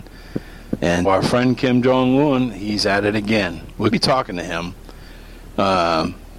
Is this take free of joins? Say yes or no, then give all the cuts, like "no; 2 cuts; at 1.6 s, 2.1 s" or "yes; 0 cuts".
no; 2 cuts; at 1.0 s, 3.9 s